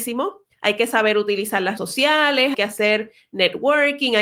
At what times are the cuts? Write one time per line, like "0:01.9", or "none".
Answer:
0:01.8
0:02.5